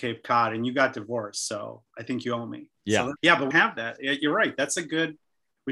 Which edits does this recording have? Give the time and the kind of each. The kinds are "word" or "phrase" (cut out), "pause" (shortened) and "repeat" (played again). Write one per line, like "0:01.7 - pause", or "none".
0:02.8 - pause
0:03.2 - word
0:03.5 - word